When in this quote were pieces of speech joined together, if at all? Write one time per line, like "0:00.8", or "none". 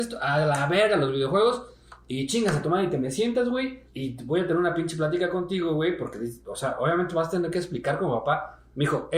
0:03.9